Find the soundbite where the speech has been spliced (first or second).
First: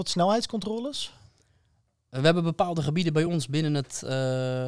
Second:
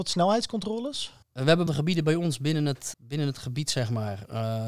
second